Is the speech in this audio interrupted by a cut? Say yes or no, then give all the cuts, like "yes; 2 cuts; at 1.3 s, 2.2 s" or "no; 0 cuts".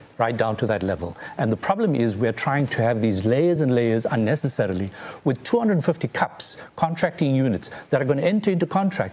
no; 0 cuts